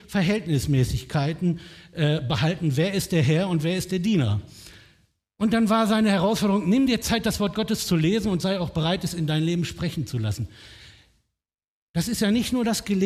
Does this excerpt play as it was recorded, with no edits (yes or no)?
yes